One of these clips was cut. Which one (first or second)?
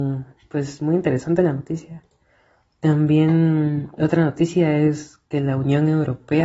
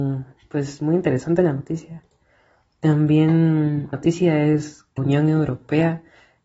second